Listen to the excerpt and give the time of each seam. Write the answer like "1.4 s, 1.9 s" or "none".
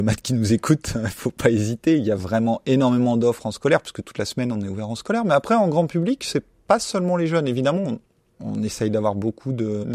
none